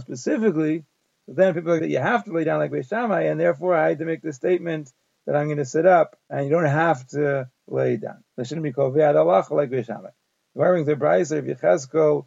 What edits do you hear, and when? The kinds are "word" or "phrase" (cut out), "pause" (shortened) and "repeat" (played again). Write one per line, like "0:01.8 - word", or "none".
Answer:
0:01.8 - phrase
0:06.2 - pause
0:08.3 - pause